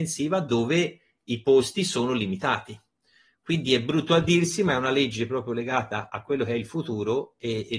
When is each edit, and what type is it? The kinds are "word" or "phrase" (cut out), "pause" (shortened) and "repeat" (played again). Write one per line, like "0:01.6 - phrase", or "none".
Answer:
0:06.1 - word